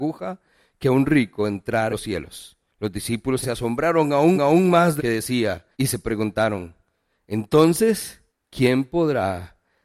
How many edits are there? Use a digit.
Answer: 7